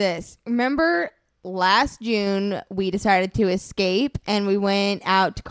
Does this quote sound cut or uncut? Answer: uncut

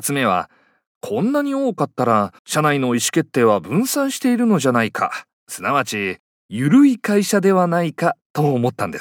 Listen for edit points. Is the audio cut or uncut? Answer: cut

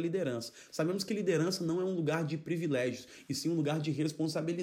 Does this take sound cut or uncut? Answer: uncut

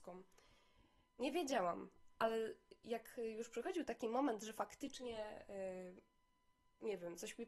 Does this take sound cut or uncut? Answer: uncut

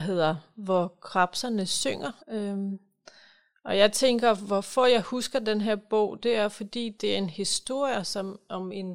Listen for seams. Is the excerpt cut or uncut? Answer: cut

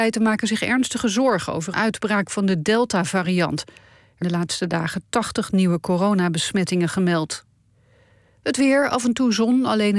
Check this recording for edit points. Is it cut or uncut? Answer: cut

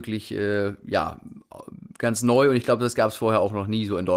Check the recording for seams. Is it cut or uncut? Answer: uncut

